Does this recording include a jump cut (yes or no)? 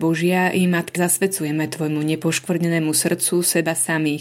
yes